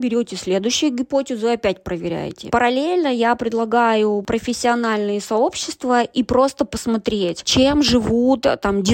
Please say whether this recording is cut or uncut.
cut